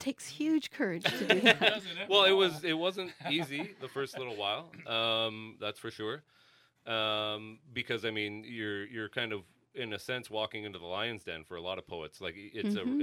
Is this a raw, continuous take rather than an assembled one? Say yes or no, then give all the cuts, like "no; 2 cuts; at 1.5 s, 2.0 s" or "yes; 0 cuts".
yes; 0 cuts